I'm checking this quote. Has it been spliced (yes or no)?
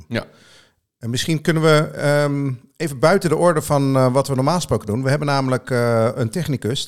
no